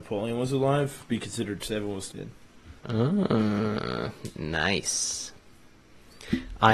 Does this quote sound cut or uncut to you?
cut